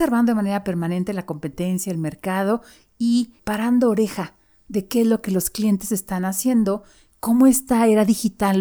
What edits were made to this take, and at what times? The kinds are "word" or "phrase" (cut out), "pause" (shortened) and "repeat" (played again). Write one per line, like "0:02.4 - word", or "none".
none